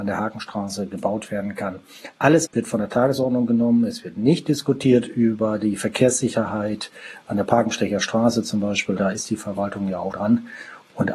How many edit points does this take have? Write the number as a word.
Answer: three